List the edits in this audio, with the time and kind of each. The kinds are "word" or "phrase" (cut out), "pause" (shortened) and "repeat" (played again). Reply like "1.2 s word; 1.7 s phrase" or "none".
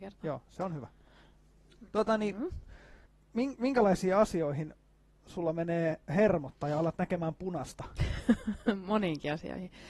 none